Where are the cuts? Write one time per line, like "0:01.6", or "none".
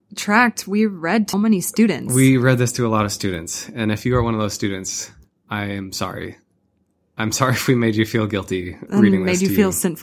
0:01.3

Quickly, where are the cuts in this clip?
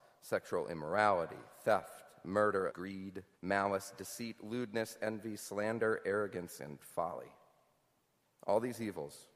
0:02.7
0:03.3

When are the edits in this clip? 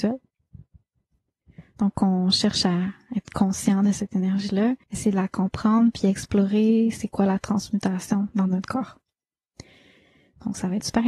0:04.8

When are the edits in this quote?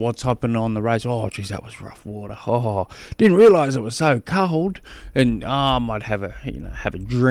none

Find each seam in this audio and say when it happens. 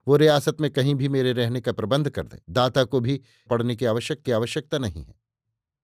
0:02.4
0:03.5
0:04.2

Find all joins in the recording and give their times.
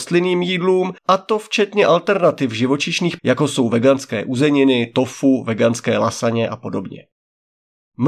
0:01.0
0:03.2

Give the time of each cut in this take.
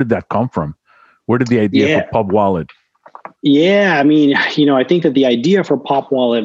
0:03.4

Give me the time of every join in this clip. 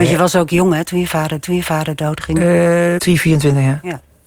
0:01.4
0:03.0

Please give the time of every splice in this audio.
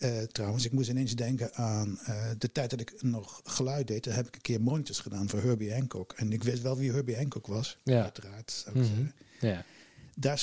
none

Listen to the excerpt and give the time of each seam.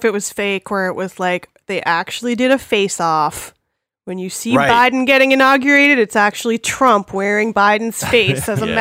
none

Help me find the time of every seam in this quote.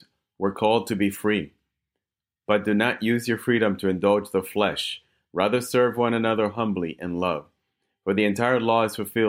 none

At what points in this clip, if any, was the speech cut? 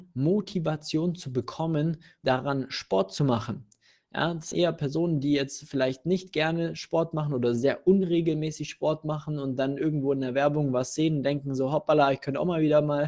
0:02.2
0:04.5

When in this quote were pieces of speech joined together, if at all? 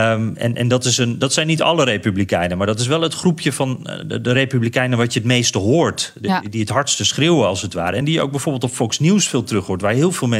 none

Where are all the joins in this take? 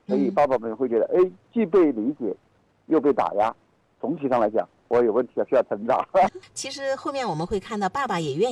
none

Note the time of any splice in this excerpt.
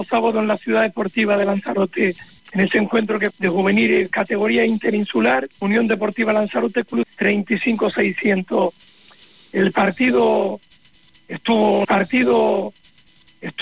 0:02.4
0:03.3
0:05.5
0:07.0
0:11.8

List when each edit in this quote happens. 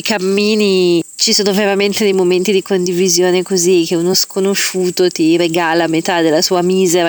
none

